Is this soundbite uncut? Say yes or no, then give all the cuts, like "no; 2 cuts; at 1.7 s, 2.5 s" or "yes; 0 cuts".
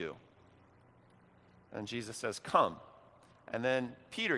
yes; 0 cuts